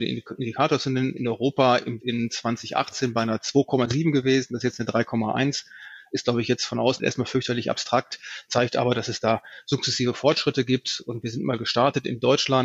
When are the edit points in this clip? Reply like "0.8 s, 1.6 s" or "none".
2.0 s, 7.0 s